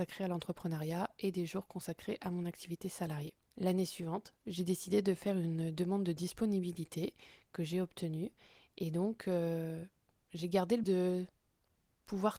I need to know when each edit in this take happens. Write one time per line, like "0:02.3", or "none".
0:10.8